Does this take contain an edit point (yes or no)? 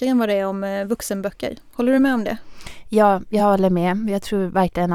no